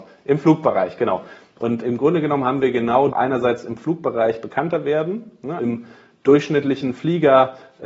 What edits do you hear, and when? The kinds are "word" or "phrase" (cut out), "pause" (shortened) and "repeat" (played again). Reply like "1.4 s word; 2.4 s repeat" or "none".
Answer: 1.8 s word; 3.1 s phrase; 5.6 s word